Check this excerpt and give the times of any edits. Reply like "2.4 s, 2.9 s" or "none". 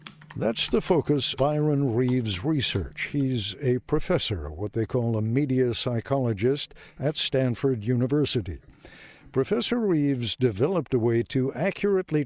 1.4 s